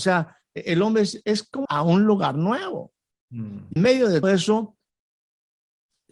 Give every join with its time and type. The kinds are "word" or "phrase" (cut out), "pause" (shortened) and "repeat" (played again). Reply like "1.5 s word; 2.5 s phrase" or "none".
1.2 s word; 1.6 s word; 3.8 s word; 4.2 s word